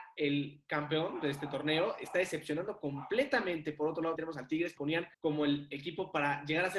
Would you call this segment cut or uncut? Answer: cut